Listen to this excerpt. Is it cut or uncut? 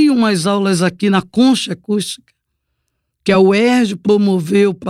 uncut